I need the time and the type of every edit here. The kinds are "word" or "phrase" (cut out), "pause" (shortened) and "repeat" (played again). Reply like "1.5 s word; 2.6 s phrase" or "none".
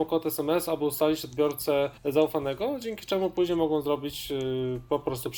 2.0 s pause

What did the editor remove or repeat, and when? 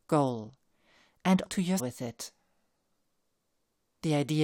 1.4 s word; 1.8 s word

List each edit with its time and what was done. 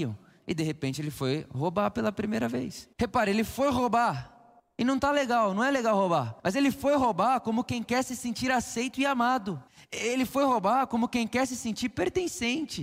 2.9 s pause; 4.6 s pause; 6.4 s pause; 9.7 s pause

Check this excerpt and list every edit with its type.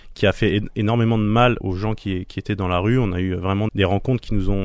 1.6 s word; 3.7 s word

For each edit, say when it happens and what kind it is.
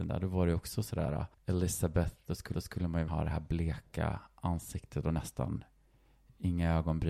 1.3 s pause; 2.5 s repeat; 3.1 s word

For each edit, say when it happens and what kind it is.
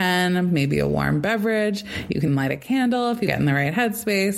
2.3 s word; 3.3 s word

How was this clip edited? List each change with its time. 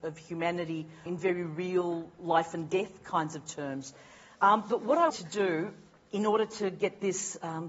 1.1 s word; 5.1 s word

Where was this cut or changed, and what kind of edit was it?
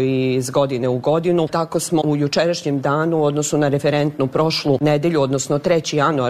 2.0 s word

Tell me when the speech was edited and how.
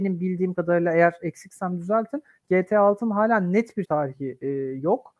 3.8 s word

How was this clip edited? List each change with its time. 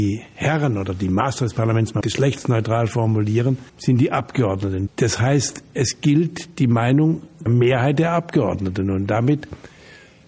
2.0 s phrase; 3.7 s pause; 7.5 s phrase

